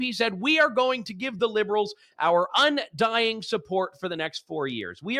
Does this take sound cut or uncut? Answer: uncut